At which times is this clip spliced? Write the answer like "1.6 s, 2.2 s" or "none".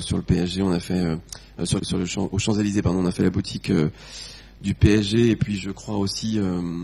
1.8 s